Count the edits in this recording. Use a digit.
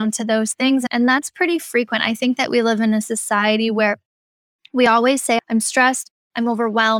0